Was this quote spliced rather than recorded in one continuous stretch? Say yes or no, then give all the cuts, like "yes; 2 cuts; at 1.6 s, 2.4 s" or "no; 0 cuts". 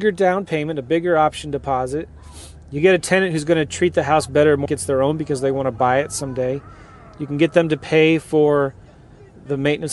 yes; 1 cut; at 4.7 s